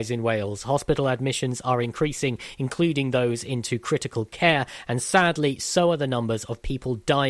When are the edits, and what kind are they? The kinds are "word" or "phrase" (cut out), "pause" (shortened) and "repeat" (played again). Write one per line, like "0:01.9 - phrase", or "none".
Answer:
none